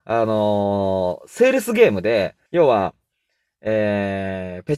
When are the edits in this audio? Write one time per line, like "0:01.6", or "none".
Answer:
0:02.5